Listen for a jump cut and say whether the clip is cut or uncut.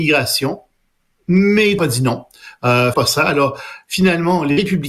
cut